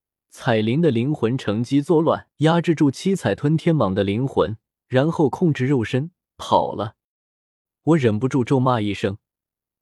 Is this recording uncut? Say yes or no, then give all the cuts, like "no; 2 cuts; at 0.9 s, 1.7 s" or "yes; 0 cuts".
no; 2 cuts; at 2.3 s, 4.8 s